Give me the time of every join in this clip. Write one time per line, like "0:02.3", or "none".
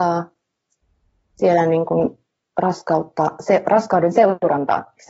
none